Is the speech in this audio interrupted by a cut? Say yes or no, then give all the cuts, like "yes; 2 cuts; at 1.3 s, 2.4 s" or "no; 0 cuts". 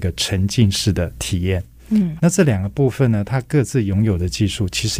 yes; 1 cut; at 2.2 s